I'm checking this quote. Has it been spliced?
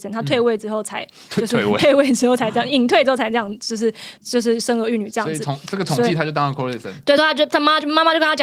no; 0 cuts

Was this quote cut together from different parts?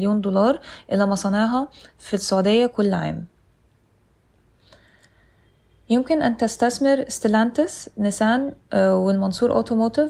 no; 0 cuts

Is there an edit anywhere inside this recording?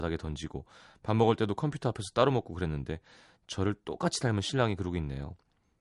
no; 0 cuts

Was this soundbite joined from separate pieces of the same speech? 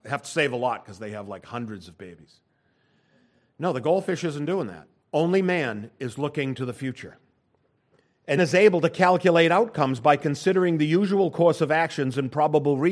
yes; 2 cuts; at 5.0 s, 8.4 s

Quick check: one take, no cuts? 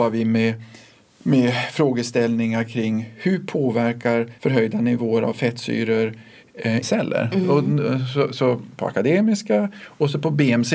no; 2 cuts; at 4.4 s, 6.8 s

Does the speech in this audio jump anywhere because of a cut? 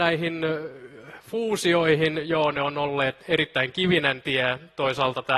yes; 1 cut; at 3.2 s

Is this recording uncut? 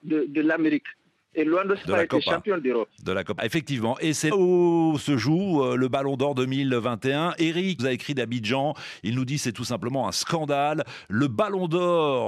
no; 4 cuts; at 1.8 s, 3.4 s, 4.3 s, 7.8 s

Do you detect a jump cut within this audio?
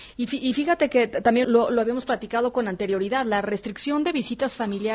yes; 1 cut; at 1.4 s

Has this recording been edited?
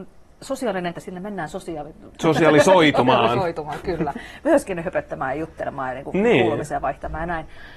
yes; 2 cuts; at 0.9 s, 2.1 s

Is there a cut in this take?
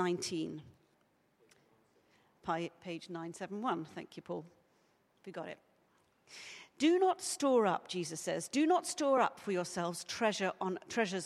no; 0 cuts

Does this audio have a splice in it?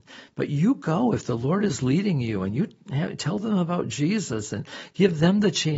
no; 0 cuts

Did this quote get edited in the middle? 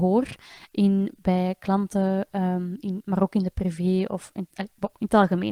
no; 0 cuts

